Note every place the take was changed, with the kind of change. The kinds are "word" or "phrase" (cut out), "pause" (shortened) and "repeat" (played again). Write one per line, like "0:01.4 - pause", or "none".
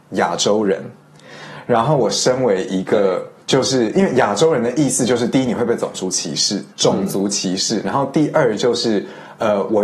0:03.4 - pause
0:06.7 - pause